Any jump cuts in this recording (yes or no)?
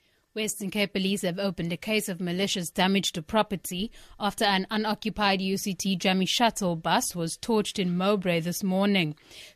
no